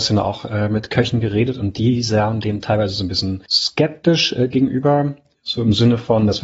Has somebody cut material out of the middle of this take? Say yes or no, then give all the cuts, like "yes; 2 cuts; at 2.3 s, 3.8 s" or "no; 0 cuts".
yes; 1 cut; at 3.5 s